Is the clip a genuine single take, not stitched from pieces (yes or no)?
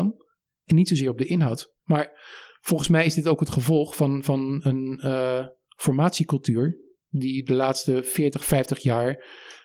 no